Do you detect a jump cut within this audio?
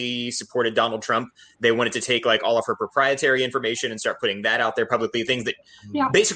no; 0 cuts

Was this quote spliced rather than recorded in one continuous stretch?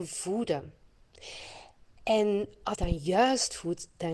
yes; 2 cuts; at 1.9 s, 2.7 s

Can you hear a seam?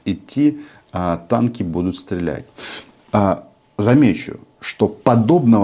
no; 0 cuts

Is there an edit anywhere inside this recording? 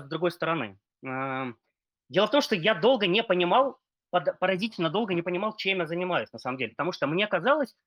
no; 0 cuts

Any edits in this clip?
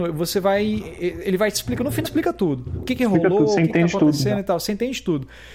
yes; 1 cut; at 2.0 s

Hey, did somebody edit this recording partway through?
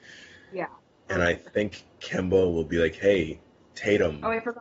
yes; 1 cut; at 3.6 s

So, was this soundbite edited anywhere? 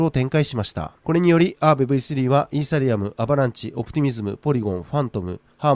yes; 1 cut; at 1.0 s

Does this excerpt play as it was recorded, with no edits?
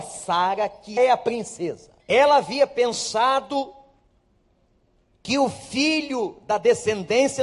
no; 2 cuts; at 1.0 s, 2.0 s

